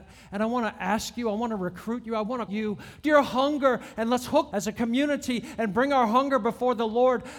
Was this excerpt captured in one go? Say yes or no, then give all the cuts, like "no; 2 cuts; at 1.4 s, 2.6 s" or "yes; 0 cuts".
no; 3 cuts; at 2.5 s, 3.0 s, 4.5 s